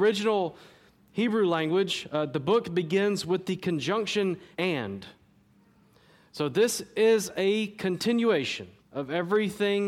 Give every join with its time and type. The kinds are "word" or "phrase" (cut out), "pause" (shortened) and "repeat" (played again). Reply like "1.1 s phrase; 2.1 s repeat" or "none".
4.5 s pause; 8.8 s pause